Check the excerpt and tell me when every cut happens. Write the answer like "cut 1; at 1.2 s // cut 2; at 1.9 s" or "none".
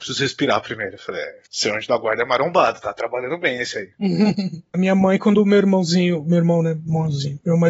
cut 1; at 4.7 s